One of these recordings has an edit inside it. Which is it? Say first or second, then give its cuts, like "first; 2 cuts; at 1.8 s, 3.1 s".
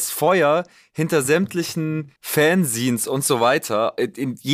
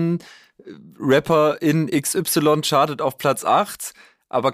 first; 1 cut; at 2.2 s